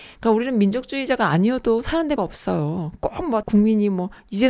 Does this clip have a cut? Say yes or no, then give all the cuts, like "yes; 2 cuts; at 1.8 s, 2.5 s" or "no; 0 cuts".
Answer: yes; 2 cuts; at 2.2 s, 3.4 s